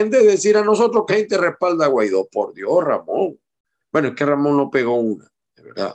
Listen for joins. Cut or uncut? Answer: cut